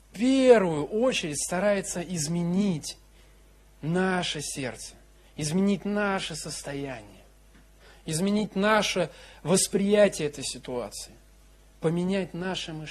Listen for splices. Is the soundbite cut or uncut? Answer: uncut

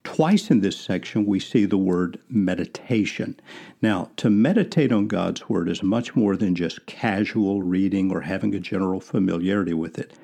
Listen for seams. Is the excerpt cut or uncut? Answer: uncut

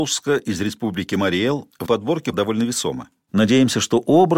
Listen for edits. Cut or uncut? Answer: cut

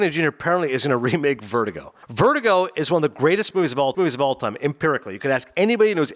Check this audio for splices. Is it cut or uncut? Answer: cut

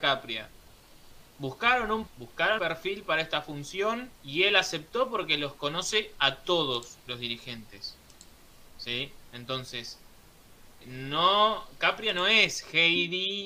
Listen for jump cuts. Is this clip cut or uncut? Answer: cut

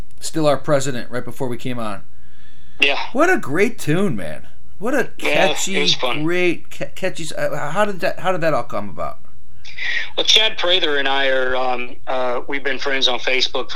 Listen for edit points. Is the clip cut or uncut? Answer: uncut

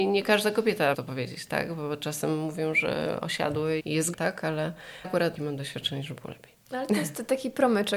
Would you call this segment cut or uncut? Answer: cut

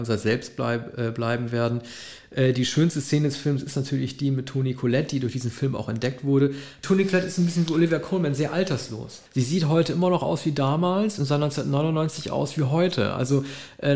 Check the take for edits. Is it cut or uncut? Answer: cut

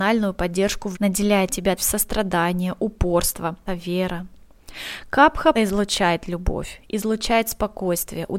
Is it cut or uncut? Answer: cut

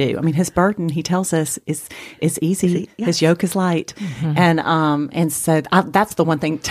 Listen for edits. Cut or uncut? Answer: uncut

